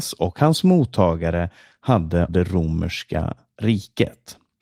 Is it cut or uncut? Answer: cut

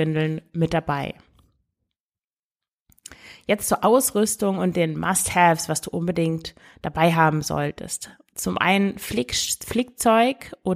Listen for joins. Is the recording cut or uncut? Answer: uncut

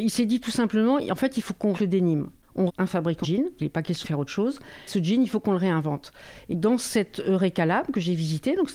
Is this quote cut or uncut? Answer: cut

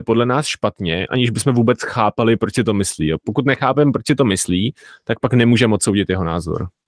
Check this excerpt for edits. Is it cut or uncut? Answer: uncut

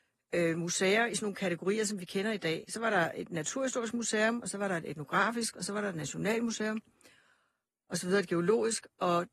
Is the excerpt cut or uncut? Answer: uncut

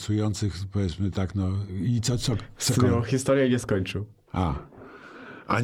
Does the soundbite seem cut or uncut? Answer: uncut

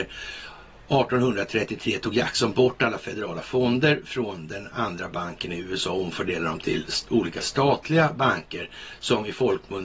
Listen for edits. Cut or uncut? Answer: uncut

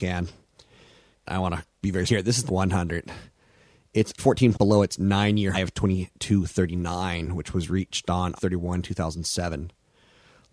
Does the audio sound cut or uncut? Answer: cut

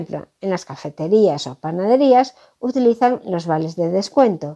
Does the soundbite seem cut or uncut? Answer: uncut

